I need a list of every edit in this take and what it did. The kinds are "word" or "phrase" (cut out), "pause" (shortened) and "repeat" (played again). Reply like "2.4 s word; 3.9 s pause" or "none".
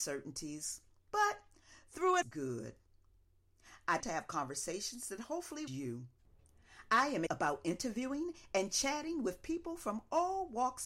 2.2 s phrase; 4.0 s word; 5.7 s phrase; 7.3 s word